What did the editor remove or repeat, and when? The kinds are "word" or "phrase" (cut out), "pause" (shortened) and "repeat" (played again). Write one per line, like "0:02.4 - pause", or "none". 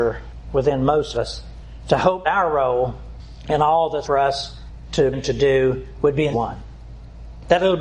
0:01.1 - word
0:02.2 - word
0:04.0 - word
0:05.1 - word
0:06.3 - word